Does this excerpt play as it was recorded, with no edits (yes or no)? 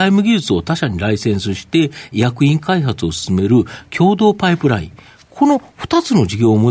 yes